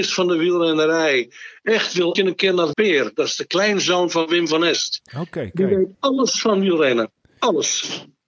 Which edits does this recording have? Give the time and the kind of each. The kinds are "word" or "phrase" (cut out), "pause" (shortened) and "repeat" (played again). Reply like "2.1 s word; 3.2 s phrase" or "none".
2.2 s phrase; 2.7 s phrase; 5.9 s pause